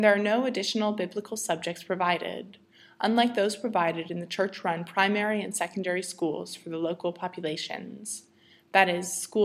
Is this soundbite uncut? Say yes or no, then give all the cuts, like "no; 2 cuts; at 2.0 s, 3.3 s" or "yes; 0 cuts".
yes; 0 cuts